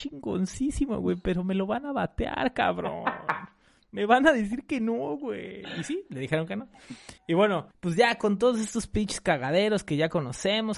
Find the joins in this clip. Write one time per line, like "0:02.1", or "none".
0:07.2
0:07.7